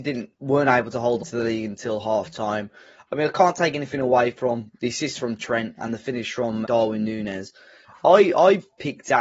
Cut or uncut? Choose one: cut